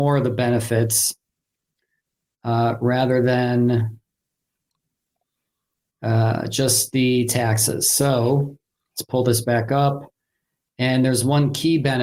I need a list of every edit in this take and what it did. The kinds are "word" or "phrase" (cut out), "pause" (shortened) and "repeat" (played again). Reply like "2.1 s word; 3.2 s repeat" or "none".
none

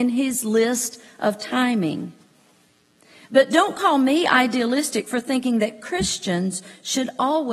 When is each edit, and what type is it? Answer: none

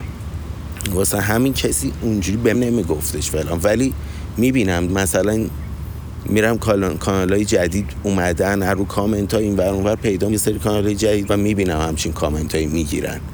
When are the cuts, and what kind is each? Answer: 2.5 s word; 4.9 s word; 10.3 s word; 11.3 s word

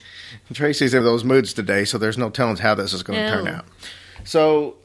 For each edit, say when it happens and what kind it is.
1.0 s word

